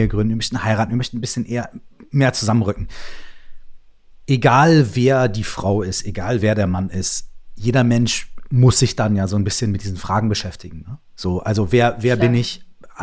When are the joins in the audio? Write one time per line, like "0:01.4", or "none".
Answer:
none